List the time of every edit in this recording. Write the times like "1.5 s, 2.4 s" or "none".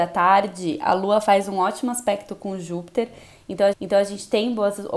3.7 s